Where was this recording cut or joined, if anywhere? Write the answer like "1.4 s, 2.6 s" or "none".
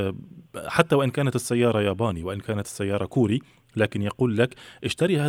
none

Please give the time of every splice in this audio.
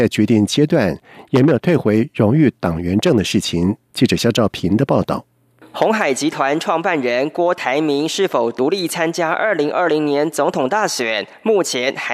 none

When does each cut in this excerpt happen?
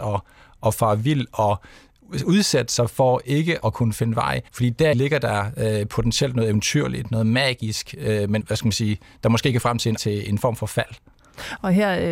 3.6 s, 4.5 s, 4.9 s, 8.4 s, 9.6 s, 10.0 s

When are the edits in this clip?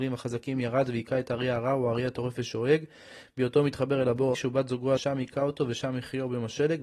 4.3 s, 5.0 s

